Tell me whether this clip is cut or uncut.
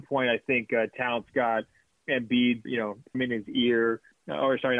cut